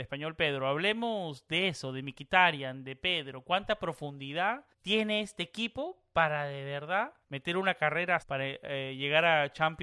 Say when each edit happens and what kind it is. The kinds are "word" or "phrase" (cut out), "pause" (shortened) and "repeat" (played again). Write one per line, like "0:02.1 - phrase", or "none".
0:04.7 - pause
0:07.2 - pause
0:08.2 - word